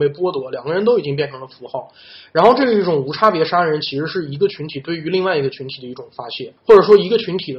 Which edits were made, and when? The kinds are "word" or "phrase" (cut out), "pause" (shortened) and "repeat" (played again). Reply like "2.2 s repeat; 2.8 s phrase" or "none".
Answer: 6.6 s pause